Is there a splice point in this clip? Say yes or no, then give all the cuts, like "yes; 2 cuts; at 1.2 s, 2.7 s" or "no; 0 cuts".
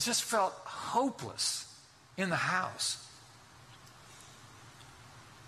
no; 0 cuts